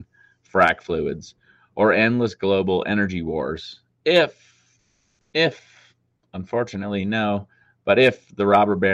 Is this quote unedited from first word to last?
yes; 0 cuts

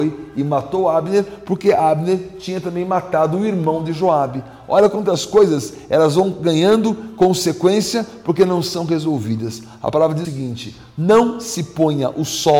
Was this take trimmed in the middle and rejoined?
yes; 1 cut; at 10.2 s

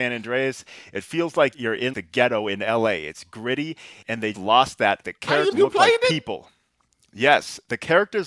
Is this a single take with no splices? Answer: no; 6 cuts; at 1.5 s, 1.9 s, 4.0 s, 4.3 s, 5.0 s, 5.5 s

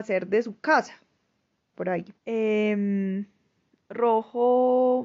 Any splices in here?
yes; 2 cuts; at 1.7 s, 2.2 s

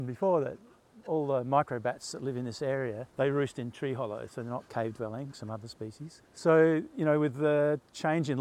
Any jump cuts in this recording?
yes; 3 cuts; at 3.1 s, 5.3 s, 6.2 s

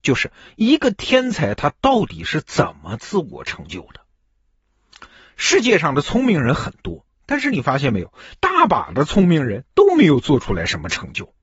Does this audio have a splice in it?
no; 0 cuts

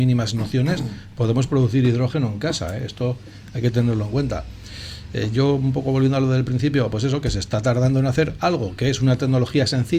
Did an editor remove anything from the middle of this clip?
no; 0 cuts

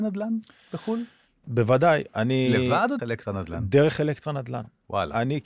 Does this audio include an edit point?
yes; 2 cuts; at 1.4 s, 3.0 s

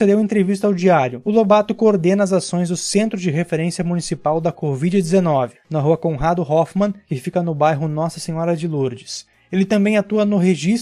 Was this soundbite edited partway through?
no; 0 cuts

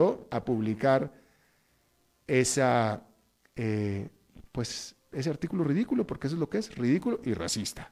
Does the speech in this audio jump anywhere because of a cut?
no; 0 cuts

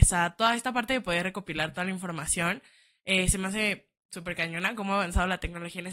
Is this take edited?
no; 0 cuts

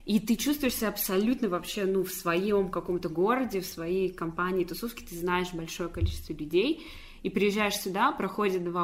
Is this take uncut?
yes; 0 cuts

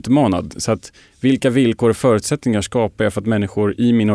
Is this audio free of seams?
yes; 0 cuts

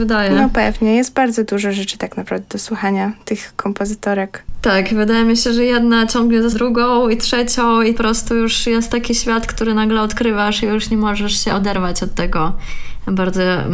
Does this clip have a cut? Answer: yes; 2 cuts; at 6.5 s, 8.0 s

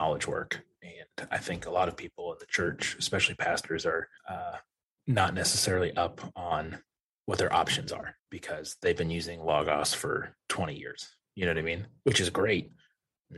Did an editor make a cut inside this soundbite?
yes; 3 cuts; at 4.2 s, 6.9 s, 8.2 s

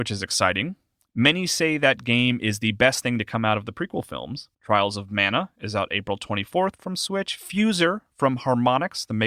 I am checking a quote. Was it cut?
yes; 1 cut; at 4.5 s

